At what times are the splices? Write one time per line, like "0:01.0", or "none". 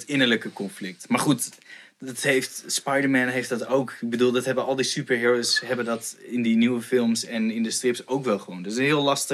none